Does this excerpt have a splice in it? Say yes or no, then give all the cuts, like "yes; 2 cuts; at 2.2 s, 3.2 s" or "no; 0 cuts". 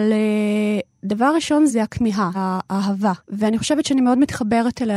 yes; 3 cuts; at 1.7 s, 2.3 s, 3.2 s